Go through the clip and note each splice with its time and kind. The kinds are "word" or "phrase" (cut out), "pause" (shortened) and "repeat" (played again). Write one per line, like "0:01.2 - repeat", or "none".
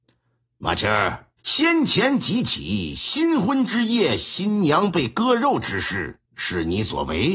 0:01.4 - pause
0:06.3 - pause